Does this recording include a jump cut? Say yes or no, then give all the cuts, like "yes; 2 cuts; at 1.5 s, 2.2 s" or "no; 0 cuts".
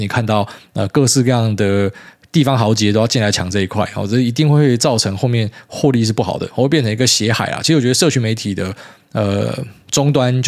no; 0 cuts